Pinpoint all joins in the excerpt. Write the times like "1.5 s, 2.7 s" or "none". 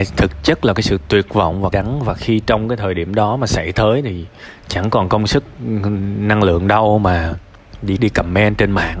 1.7 s, 8.0 s

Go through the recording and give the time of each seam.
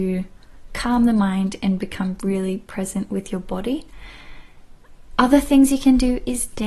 none

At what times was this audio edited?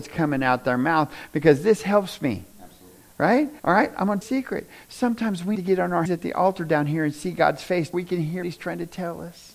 2.5 s, 3.6 s, 4.2 s, 5.6 s, 6.1 s, 7.9 s, 8.4 s

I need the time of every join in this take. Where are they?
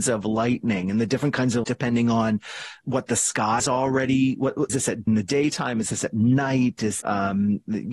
1.6 s, 2.8 s, 3.6 s, 4.7 s, 5.1 s, 7.0 s

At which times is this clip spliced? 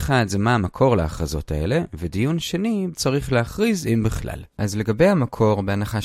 2.9 s, 4.5 s

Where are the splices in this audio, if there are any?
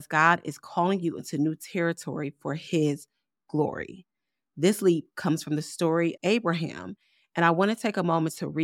6.2 s

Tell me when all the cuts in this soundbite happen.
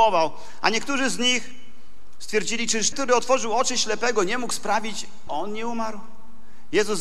2.9 s, 5.3 s

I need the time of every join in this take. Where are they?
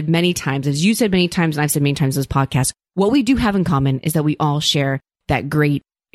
none

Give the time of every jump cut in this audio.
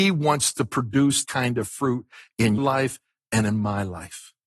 1.2 s, 2.6 s

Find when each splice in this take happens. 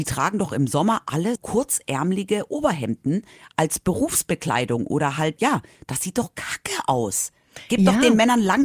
1.4 s, 5.4 s

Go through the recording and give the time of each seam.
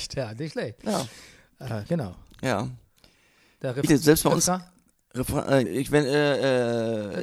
3.9 s, 5.7 s

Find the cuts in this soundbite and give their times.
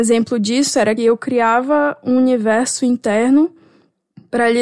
1.0 s

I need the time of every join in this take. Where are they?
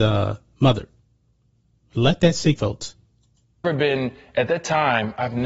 2.6 s, 3.6 s

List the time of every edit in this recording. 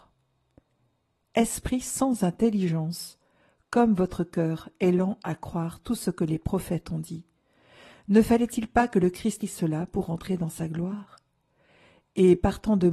9.4 s

